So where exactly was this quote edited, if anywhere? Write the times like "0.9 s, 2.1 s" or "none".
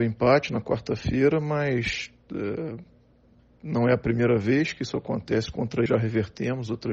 5.9 s